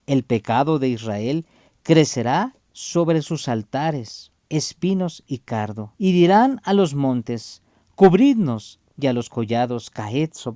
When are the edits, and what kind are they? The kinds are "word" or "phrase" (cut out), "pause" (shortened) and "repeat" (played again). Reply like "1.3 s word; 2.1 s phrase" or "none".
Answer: 2.6 s pause; 4.4 s pause; 5.9 s pause